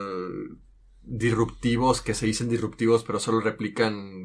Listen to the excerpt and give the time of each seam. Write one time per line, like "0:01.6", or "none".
none